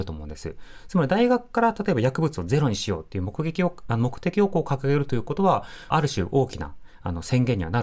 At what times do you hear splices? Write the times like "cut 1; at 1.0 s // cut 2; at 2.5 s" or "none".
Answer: cut 1; at 5.9 s